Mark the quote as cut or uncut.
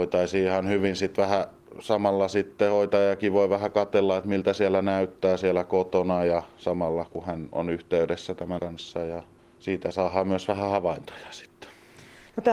cut